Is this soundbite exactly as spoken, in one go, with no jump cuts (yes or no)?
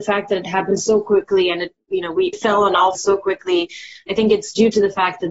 no